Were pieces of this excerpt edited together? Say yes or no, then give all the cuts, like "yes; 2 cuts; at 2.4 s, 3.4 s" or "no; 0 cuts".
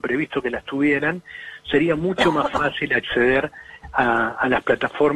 no; 0 cuts